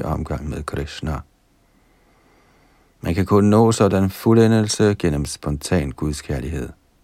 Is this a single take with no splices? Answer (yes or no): yes